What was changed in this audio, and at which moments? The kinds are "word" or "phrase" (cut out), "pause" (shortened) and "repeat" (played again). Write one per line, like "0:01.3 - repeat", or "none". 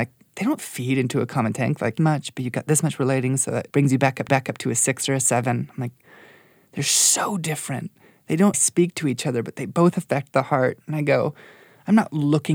0:02.0 - phrase
0:03.7 - pause
0:04.3 - repeat
0:08.5 - phrase